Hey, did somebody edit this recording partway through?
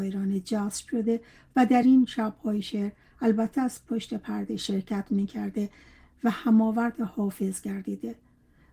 no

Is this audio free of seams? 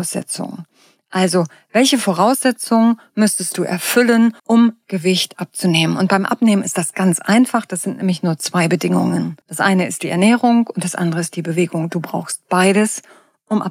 no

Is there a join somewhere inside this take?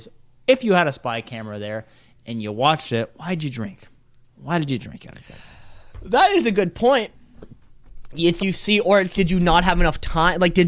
yes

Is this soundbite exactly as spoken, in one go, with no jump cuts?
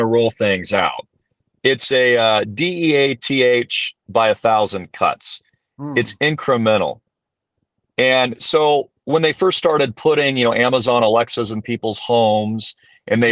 yes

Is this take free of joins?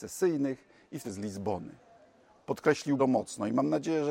no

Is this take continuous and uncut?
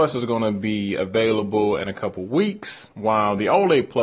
no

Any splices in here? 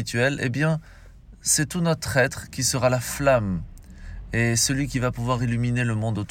no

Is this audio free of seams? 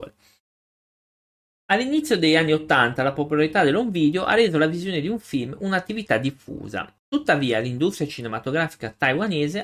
no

